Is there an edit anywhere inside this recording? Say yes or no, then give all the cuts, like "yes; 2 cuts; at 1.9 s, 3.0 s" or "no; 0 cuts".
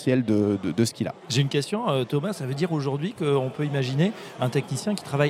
no; 0 cuts